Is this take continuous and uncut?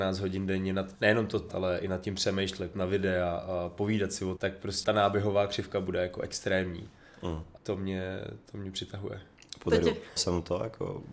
no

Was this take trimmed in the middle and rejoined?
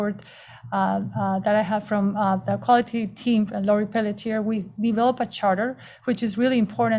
no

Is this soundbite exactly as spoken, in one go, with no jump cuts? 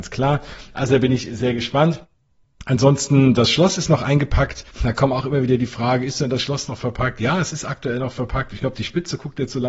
no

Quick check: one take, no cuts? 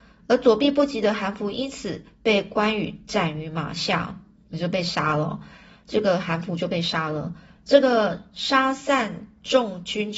yes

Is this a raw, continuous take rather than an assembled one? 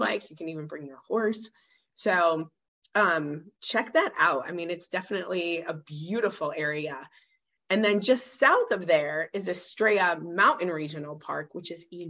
no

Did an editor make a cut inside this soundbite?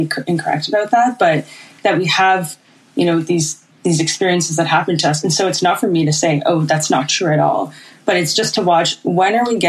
no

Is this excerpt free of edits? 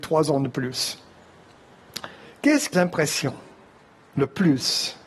no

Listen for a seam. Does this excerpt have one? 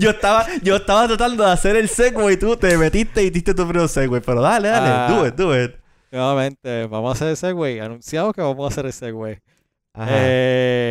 no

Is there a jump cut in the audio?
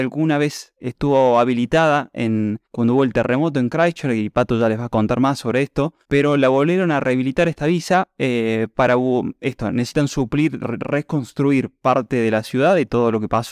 yes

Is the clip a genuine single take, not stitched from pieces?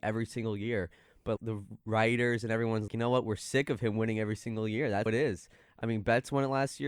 no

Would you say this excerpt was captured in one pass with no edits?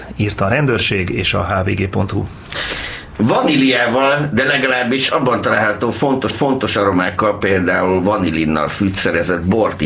no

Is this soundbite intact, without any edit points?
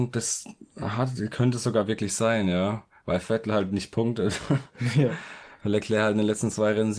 yes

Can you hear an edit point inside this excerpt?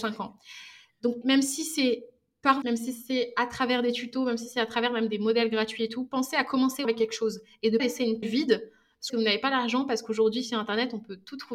yes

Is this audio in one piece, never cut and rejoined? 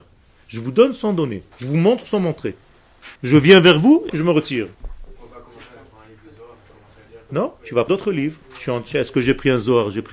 no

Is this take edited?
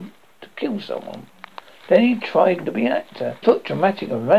yes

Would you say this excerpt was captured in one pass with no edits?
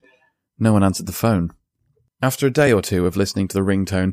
yes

